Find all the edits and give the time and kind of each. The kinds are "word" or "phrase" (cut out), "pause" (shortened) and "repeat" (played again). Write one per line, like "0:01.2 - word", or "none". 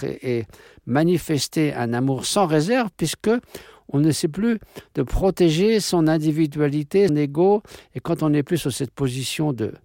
0:07.1 - word